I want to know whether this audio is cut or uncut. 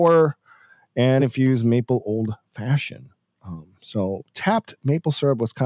cut